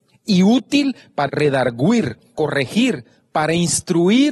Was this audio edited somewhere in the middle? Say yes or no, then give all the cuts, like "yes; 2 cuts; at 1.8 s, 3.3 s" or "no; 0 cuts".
yes; 2 cuts; at 1.3 s, 2.3 s